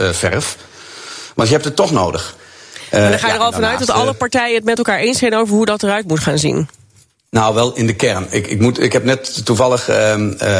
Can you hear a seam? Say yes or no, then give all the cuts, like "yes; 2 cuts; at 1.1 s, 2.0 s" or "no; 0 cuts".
no; 0 cuts